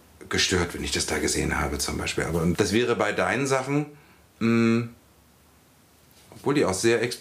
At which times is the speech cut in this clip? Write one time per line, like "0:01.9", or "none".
0:02.5